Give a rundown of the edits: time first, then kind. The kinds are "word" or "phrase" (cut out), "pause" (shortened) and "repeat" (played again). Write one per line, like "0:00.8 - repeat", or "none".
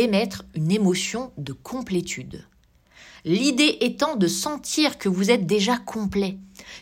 none